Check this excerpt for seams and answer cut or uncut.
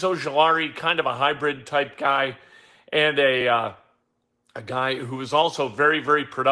uncut